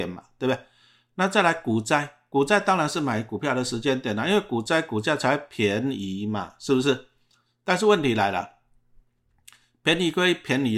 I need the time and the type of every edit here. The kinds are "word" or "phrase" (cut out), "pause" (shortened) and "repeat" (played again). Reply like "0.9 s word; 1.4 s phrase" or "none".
none